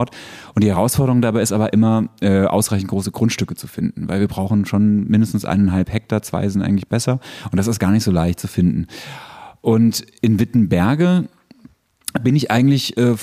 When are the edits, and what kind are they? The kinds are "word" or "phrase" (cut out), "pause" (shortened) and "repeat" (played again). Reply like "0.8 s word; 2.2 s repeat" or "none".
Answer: none